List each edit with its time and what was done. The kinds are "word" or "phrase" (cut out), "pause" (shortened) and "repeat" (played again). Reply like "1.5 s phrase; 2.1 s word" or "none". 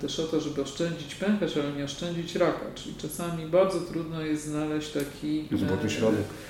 none